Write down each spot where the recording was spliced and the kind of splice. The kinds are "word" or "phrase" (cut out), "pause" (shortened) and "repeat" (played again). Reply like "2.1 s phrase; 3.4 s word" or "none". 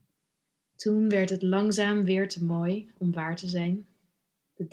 none